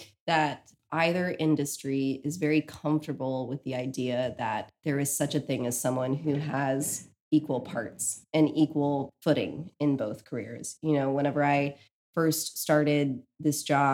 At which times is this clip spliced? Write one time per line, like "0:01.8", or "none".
none